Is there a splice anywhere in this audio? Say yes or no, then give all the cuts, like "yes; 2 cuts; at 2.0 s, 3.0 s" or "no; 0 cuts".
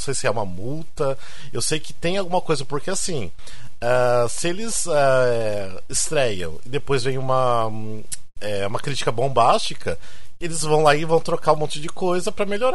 no; 0 cuts